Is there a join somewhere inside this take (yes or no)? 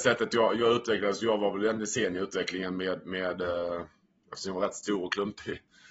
no